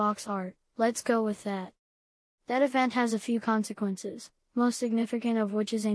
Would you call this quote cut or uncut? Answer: uncut